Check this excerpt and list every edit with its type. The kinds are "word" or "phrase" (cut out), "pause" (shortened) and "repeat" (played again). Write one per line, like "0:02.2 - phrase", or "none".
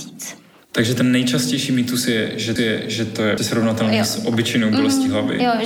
0:02.6 - repeat
0:03.4 - word